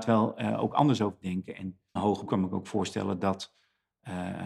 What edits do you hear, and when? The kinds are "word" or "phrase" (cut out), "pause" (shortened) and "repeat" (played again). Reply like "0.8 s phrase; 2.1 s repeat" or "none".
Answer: 1.2 s word; 2.0 s word; 2.3 s word